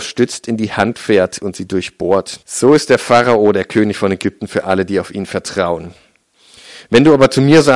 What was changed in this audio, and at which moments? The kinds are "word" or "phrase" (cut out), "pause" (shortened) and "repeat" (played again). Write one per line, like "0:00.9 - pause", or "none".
0:02.4 - pause